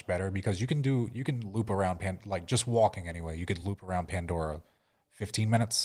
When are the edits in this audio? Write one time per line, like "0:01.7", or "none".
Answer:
none